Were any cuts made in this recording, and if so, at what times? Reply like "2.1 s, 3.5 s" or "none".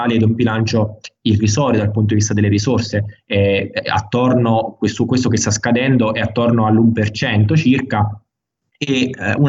none